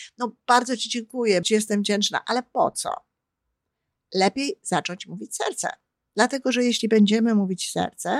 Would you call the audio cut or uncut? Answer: cut